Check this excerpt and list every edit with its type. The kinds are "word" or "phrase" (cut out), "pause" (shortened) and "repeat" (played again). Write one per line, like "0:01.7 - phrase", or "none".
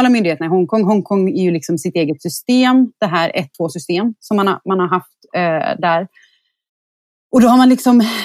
0:03.5 - word